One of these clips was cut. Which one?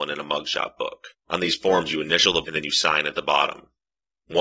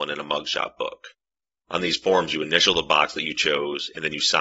first; 2 cuts; at 1.2 s, 2.4 s

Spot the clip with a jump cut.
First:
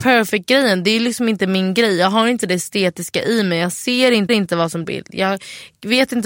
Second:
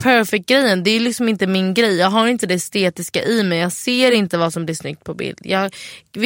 first; 2 cuts; at 4.3 s, 4.8 s

